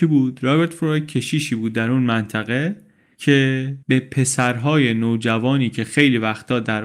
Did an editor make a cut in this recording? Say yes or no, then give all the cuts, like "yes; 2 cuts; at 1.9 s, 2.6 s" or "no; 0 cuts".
yes; 1 cut; at 3.8 s